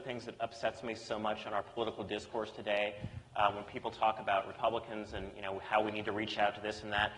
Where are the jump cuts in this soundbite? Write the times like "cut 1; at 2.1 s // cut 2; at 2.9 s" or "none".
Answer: none